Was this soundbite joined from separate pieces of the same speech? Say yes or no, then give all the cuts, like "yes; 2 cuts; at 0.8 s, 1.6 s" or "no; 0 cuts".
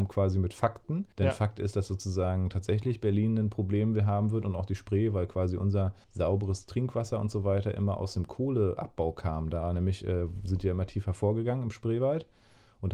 yes; 2 cuts; at 1.1 s, 6.0 s